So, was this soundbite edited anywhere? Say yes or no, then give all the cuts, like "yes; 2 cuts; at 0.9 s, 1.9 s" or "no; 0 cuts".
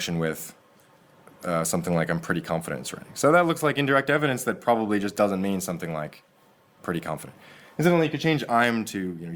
no; 0 cuts